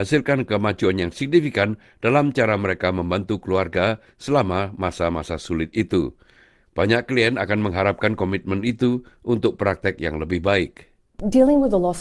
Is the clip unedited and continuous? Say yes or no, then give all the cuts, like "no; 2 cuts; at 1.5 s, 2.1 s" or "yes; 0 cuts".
yes; 0 cuts